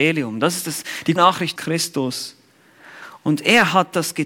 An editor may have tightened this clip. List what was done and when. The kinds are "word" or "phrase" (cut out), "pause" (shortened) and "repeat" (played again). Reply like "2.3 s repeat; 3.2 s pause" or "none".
1.2 s word; 1.6 s phrase